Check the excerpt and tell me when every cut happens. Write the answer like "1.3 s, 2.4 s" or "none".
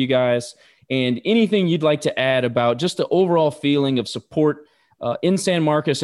none